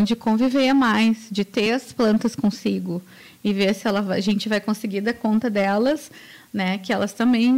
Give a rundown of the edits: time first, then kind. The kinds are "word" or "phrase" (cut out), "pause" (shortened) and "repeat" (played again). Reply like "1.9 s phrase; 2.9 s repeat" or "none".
none